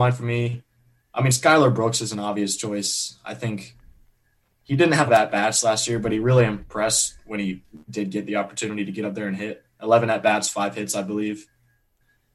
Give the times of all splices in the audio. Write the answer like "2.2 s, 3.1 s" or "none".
5.1 s, 7.8 s